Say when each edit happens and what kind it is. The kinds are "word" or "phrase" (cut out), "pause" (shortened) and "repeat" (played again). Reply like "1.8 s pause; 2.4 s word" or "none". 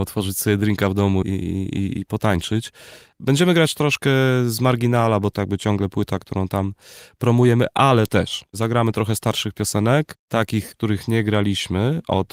1.2 s word; 1.9 s word; 5.4 s word; 10.7 s word